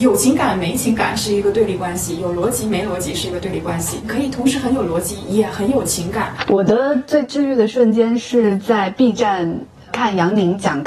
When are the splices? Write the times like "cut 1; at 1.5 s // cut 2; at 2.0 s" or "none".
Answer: none